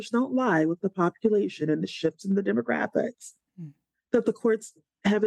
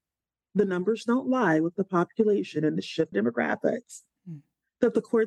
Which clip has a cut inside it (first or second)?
second